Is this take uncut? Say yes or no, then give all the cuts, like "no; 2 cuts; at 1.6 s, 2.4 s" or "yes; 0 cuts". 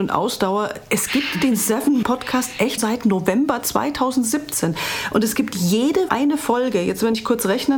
no; 3 cuts; at 2.0 s, 2.8 s, 6.1 s